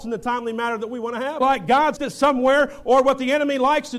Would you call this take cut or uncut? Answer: cut